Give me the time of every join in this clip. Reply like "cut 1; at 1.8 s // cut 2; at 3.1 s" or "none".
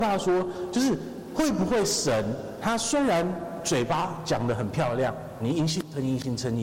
cut 1; at 5.4 s